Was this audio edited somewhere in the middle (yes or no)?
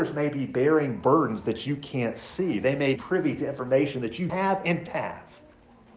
yes